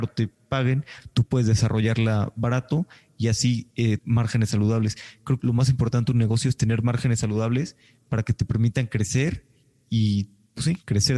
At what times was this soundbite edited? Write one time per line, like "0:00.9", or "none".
0:04.0
0:05.4